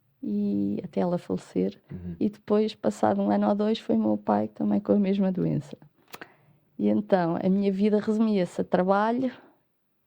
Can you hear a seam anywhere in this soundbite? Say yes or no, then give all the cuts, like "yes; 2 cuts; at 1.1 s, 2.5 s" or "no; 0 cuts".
no; 0 cuts